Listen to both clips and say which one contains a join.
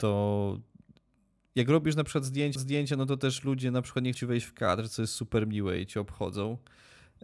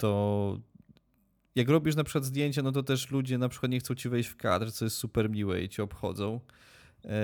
first; 2 cuts; at 2.6 s, 4.1 s

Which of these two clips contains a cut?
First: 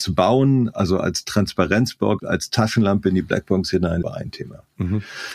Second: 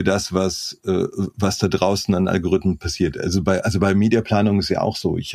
first; 2 cuts; at 2.2 s, 4.0 s

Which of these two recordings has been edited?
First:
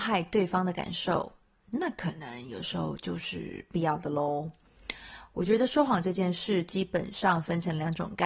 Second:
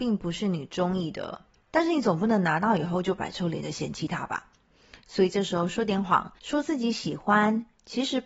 second; 2 cuts; at 1.6 s, 6.4 s

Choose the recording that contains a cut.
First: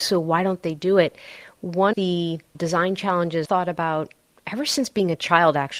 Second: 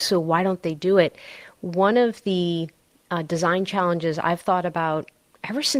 first; 3 cuts; at 1.9 s, 2.5 s, 3.4 s

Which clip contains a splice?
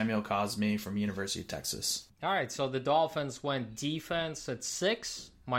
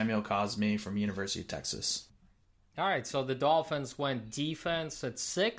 first; 1 cut; at 2.1 s

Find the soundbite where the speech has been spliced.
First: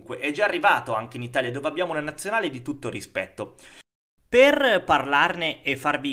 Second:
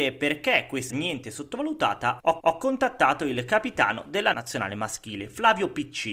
second; 3 cuts; at 0.9 s, 2.4 s, 4.3 s

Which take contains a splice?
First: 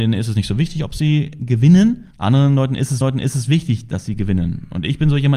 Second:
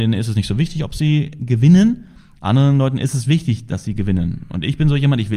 first; 2 cuts; at 2.1 s, 3.0 s

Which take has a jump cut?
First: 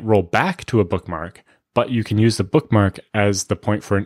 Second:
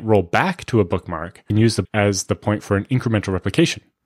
second; 2 cuts; at 1.5 s, 1.8 s

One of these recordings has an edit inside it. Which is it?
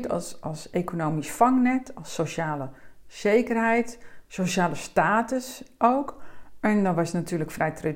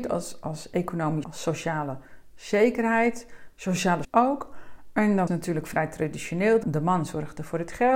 second; 4 cuts; at 1.2 s, 4.0 s, 5.3 s, 6.6 s

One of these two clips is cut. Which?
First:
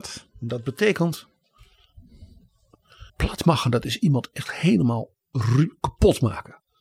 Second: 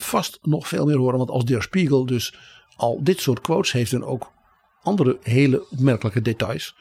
first; 1 cut; at 3.1 s

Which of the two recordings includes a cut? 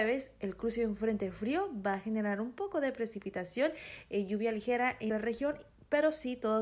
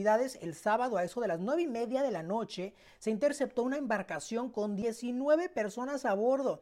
first; 1 cut; at 5.1 s

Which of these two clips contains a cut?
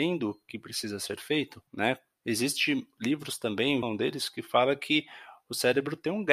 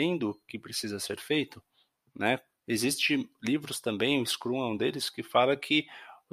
first; 2 cuts; at 1.7 s, 3.8 s

